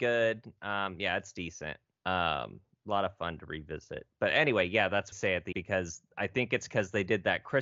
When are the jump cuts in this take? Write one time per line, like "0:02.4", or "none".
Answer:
0:01.9
0:05.1
0:05.5